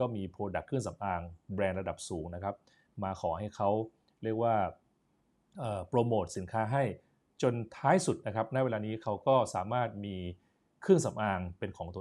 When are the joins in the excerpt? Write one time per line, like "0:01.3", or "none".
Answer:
none